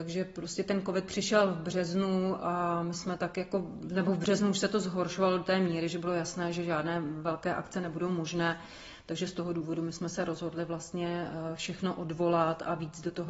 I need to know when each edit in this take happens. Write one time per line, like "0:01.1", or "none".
none